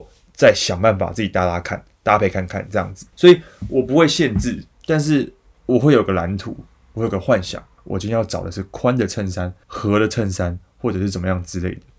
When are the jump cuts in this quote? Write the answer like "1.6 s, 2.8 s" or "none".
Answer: 3.1 s, 4.7 s, 7.8 s, 9.6 s